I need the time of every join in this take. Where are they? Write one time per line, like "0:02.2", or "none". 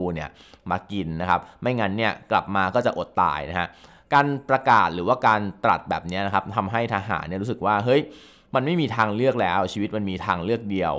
none